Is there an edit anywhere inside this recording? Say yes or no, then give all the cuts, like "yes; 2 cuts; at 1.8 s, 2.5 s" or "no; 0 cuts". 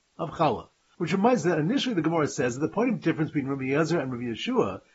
no; 0 cuts